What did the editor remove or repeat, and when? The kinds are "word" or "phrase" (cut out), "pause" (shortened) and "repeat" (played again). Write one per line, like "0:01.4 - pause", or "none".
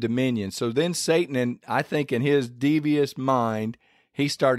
none